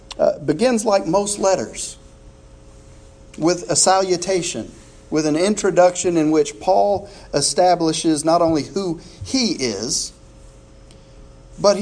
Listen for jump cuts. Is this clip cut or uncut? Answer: uncut